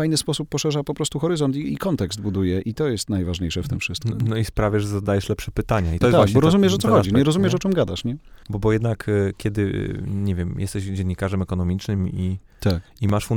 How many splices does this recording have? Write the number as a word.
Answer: two